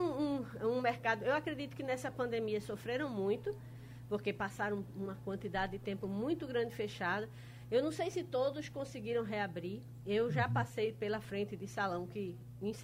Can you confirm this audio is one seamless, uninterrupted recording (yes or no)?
yes